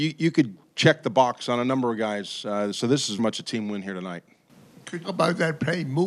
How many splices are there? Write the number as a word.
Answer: two